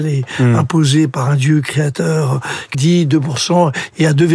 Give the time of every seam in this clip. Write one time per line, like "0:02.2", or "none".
0:02.7